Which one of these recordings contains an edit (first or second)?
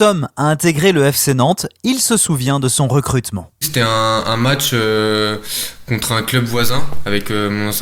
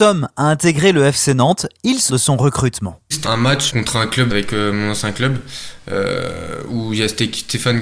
second